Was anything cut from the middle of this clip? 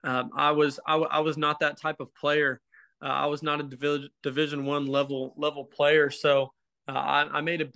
no; 0 cuts

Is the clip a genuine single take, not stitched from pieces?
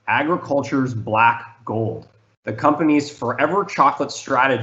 no; 1 cut; at 2.3 s

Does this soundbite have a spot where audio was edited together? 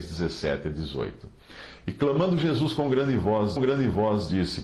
yes; 1 cut; at 3.6 s

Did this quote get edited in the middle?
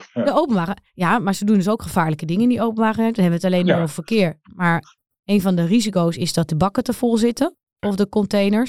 no; 0 cuts

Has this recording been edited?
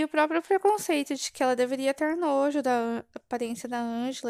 no; 0 cuts

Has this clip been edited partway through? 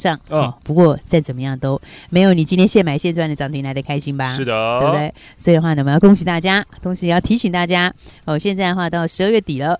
no; 0 cuts

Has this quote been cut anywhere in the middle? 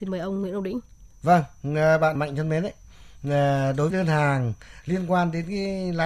yes; 2 cuts; at 2.2 s, 3.9 s

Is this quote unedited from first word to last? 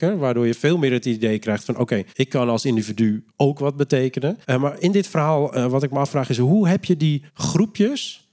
no; 4 cuts; at 2.1 s, 3.3 s, 4.4 s, 7.3 s

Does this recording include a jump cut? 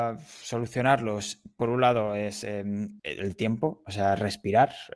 yes; 1 cut; at 3.0 s

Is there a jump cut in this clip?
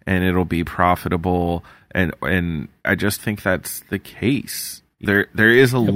yes; 3 cuts; at 2.8 s, 3.2 s, 5.0 s

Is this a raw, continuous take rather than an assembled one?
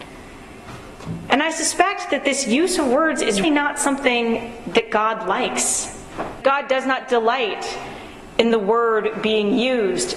no; 2 cuts; at 3.4 s, 6.4 s

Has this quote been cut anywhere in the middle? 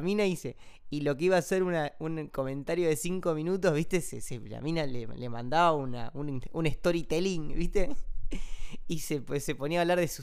no; 0 cuts

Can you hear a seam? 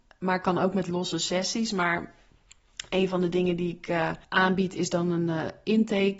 yes; 1 cut; at 4.2 s

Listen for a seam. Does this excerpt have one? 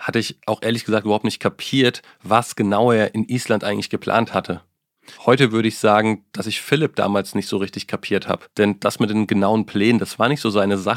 yes; 2 cuts; at 5.1 s, 8.5 s

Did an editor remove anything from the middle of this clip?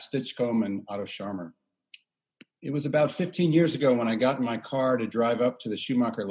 no; 0 cuts

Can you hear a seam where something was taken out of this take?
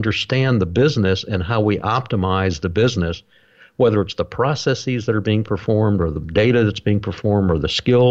no; 0 cuts

